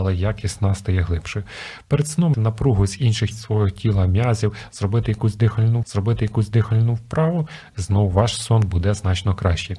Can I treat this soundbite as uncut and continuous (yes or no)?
no